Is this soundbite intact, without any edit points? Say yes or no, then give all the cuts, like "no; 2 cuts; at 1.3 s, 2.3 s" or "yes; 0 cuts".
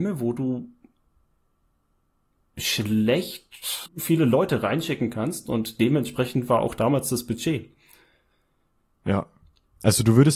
no; 1 cut; at 3.9 s